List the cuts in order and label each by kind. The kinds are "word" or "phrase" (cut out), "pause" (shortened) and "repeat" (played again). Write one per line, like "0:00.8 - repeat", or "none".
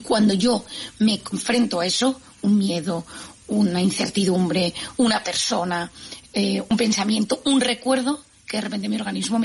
0:01.3 - word